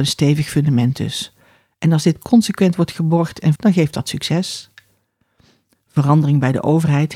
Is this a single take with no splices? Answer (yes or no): no